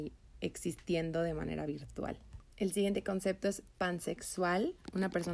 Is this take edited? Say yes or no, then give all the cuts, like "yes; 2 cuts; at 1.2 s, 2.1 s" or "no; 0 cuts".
yes; 1 cut; at 2.5 s